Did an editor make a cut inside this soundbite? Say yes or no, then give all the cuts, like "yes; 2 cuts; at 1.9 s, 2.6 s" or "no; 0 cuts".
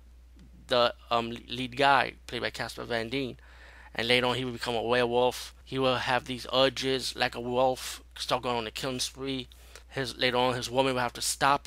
yes; 3 cuts; at 5.6 s, 8.1 s, 9.8 s